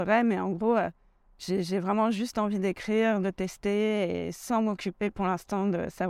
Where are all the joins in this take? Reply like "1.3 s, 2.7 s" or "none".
none